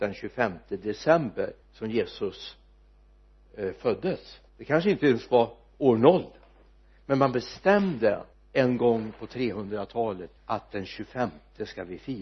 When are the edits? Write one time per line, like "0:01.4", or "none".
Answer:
0:01.6
0:04.5
0:06.7
0:08.3
0:10.4